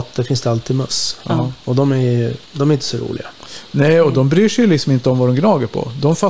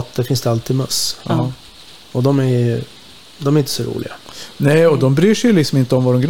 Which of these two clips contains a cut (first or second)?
first